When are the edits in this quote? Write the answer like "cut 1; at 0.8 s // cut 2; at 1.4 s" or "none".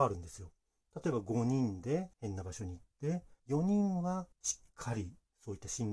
cut 1; at 2.1 s // cut 2; at 3.4 s // cut 3; at 4.3 s